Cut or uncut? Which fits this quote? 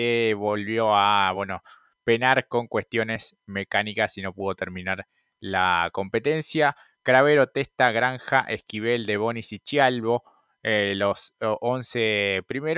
uncut